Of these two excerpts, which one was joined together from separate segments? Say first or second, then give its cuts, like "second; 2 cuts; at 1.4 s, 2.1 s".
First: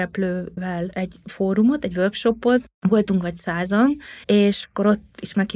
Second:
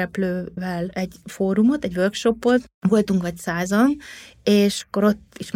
first; 1 cut; at 4.2 s